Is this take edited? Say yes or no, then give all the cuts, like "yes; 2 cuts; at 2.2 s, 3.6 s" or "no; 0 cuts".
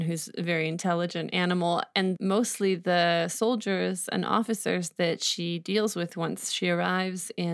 yes; 1 cut; at 2.2 s